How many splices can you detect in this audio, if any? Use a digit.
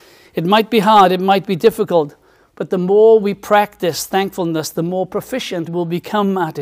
1